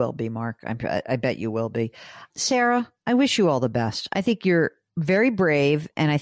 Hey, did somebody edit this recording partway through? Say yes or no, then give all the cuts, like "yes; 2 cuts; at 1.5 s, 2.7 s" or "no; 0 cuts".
no; 0 cuts